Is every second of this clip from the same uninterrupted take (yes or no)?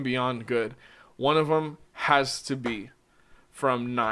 no